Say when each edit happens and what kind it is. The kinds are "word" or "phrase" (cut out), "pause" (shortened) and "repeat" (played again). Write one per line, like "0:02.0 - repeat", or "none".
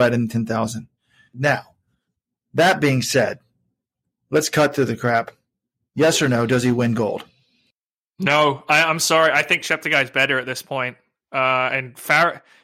none